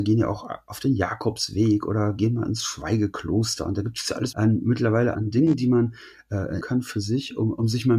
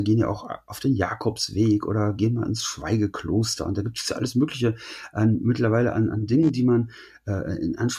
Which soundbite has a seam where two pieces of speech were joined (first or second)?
first